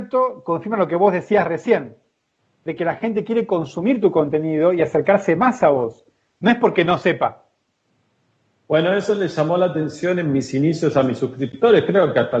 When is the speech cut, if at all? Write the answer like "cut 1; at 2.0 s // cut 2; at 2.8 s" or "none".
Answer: none

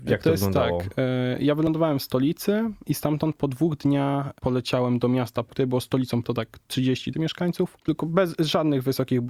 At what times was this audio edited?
cut 1; at 6.2 s // cut 2; at 7.1 s

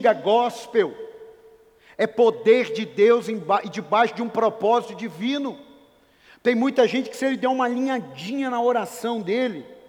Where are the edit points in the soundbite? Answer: none

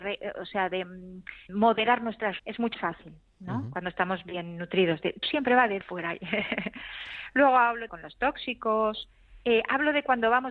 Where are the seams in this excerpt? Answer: cut 1; at 1.5 s // cut 2; at 2.4 s // cut 3; at 2.7 s // cut 4; at 5.2 s // cut 5; at 5.8 s // cut 6; at 7.9 s

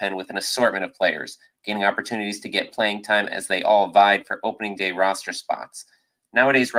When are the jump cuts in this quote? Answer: none

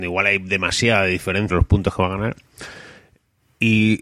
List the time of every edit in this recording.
cut 1; at 1.5 s

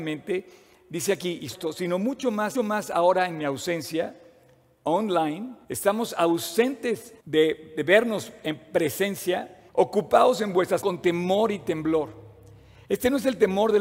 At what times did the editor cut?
cut 1; at 1.5 s // cut 2; at 2.5 s // cut 3; at 5.6 s // cut 4; at 7.2 s // cut 5; at 9.7 s // cut 6; at 10.8 s

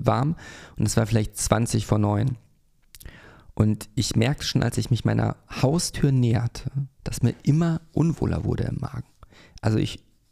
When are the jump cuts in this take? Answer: cut 1; at 6.9 s

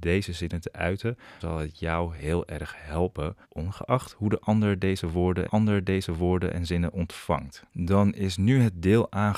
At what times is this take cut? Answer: cut 1; at 1.4 s // cut 2; at 3.4 s // cut 3; at 5.5 s // cut 4; at 7.7 s

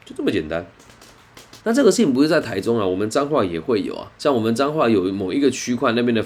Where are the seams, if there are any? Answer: cut 1; at 1.6 s // cut 2; at 4.2 s

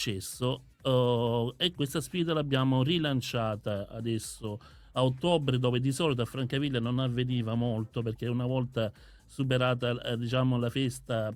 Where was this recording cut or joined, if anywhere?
cut 1; at 1.8 s

